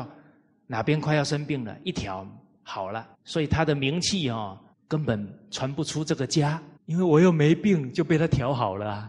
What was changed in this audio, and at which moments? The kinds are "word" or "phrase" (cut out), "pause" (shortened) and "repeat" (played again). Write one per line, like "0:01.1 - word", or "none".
0:03.1 - pause
0:04.7 - pause
0:06.8 - pause